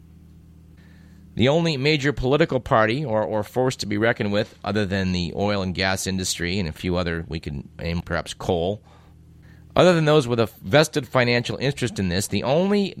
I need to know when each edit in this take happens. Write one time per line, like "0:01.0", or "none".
0:08.0